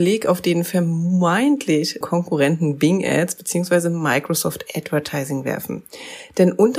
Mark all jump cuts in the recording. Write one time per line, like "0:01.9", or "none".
0:02.0